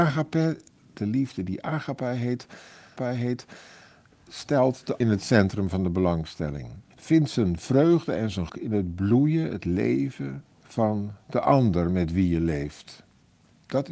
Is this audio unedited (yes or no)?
no